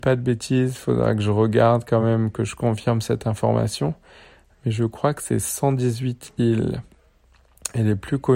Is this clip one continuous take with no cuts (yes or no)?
yes